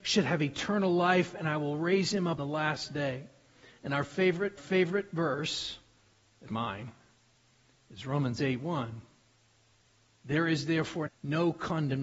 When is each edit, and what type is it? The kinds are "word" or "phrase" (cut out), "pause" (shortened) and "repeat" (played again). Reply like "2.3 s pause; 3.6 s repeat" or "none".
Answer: 2.4 s word; 4.6 s repeat; 6.5 s word; 11.1 s word